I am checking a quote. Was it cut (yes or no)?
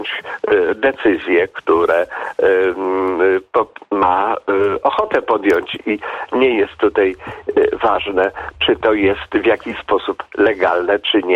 no